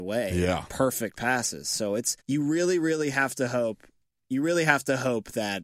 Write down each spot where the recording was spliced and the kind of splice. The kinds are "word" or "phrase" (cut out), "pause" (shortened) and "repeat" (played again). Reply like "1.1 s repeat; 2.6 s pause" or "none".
2.2 s pause